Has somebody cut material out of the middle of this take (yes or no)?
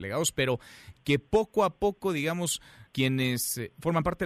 yes